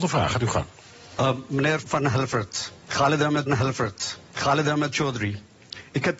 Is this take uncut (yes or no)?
no